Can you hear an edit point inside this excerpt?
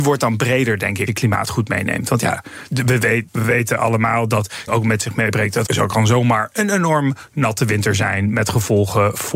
yes; 5 cuts; at 1.1 s, 2.7 s, 3.3 s, 4.7 s, 5.7 s

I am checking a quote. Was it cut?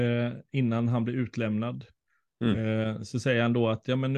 no; 0 cuts

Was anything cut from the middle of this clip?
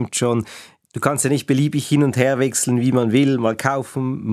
no; 0 cuts

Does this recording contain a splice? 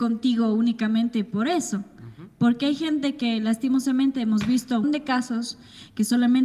yes; 1 cut; at 4.8 s

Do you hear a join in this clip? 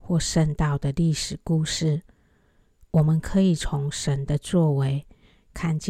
no; 0 cuts

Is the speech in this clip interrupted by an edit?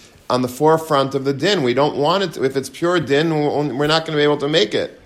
no; 0 cuts

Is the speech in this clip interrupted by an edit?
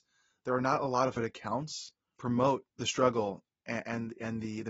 yes; 3 cuts; at 1.2 s, 2.2 s, 2.7 s

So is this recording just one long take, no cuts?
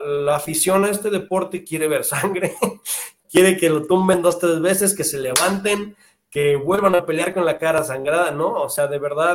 no; 1 cut; at 3.2 s

